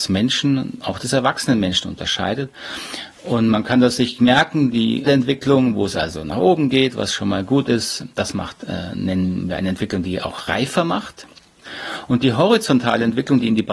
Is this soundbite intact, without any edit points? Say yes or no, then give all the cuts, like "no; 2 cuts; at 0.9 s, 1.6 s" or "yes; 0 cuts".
no; 2 cuts; at 4.2 s, 5.1 s